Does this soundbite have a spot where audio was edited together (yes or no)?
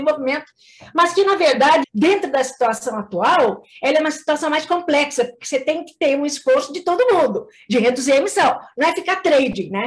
yes